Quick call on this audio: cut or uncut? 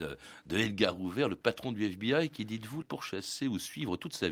cut